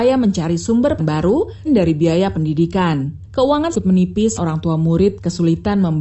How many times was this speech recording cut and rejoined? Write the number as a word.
four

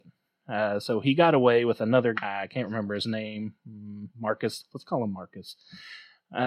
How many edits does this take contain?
two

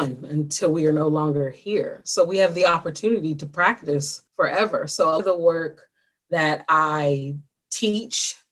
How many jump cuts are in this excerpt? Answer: two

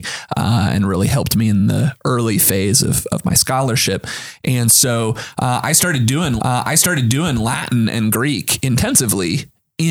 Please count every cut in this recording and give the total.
one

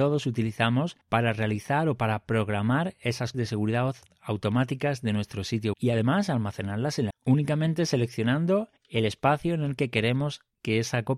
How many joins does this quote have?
five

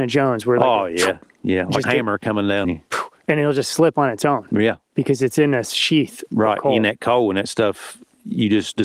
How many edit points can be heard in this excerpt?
two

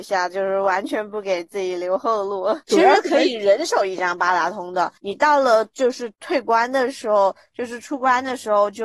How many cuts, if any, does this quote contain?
two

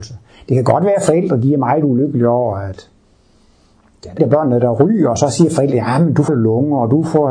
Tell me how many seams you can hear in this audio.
two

